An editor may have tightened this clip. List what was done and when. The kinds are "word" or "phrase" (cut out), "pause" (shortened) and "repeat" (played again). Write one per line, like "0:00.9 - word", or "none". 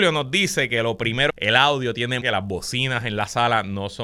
0:01.3 - phrase
0:02.2 - phrase